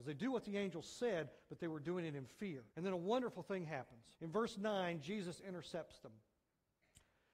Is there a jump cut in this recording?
yes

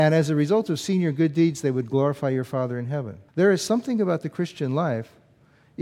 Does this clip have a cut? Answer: yes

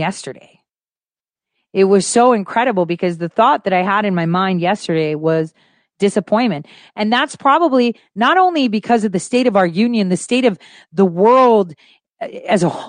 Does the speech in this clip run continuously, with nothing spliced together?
yes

